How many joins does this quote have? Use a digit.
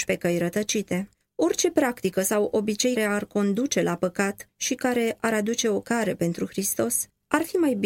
2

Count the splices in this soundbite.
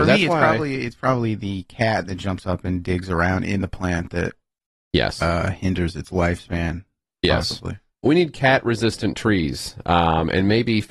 0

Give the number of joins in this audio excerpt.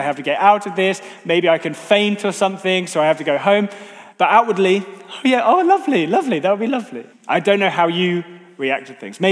2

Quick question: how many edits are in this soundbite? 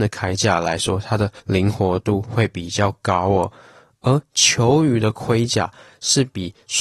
1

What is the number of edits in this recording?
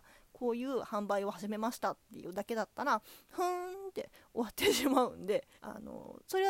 1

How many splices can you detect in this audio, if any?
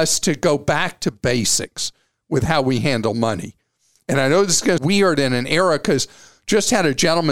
1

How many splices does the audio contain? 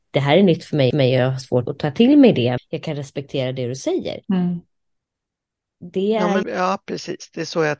5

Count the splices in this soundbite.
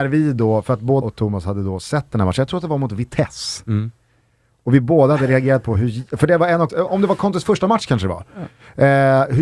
2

